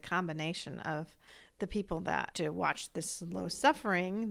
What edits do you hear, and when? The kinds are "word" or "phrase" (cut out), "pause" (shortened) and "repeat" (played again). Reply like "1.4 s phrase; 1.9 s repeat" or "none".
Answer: 1.3 s pause; 2.3 s word